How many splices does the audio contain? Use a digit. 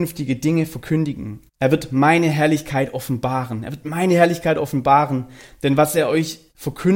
1